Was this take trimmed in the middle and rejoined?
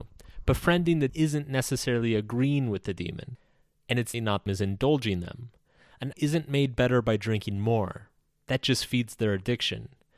yes; 4 cuts; at 1.1 s, 4.1 s, 4.5 s, 6.1 s

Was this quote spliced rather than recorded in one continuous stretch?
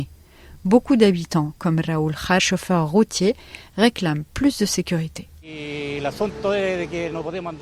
yes; 1 cut; at 2.4 s

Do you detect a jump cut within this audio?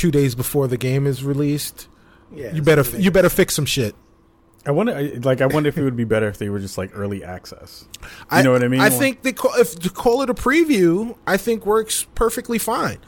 no; 0 cuts

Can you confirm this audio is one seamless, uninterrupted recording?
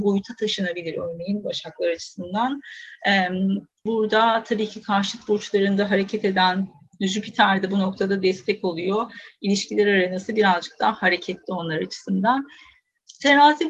no; 1 cut; at 3.9 s

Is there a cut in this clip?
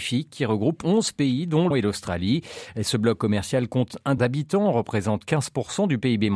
yes; 2 cuts; at 1.7 s, 4.2 s

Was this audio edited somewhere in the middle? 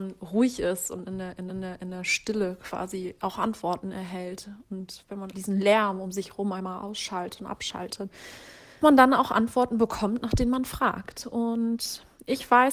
yes; 3 cuts; at 1.5 s, 5.3 s, 8.8 s

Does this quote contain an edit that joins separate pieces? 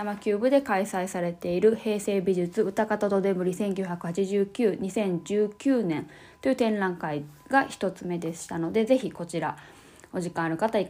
no; 0 cuts

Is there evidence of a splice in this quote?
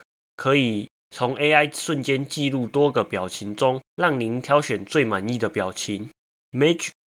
yes; 1 cut; at 3.8 s

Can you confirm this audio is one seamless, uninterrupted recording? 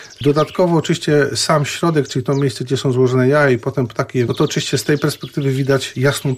no; 1 cut; at 4.3 s

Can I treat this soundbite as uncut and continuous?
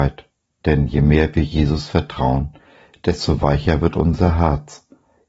yes; 0 cuts

